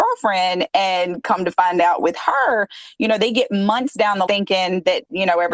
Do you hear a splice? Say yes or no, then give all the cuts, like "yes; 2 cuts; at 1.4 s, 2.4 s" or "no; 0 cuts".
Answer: yes; 1 cut; at 4.3 s